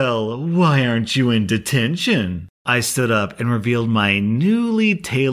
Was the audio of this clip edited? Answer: no; 0 cuts

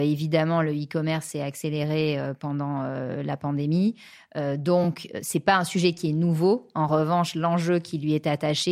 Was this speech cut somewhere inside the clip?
no; 0 cuts

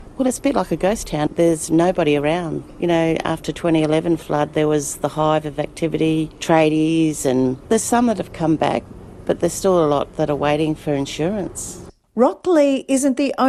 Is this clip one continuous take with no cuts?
yes; 0 cuts

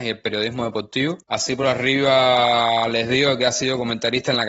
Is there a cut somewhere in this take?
no; 0 cuts

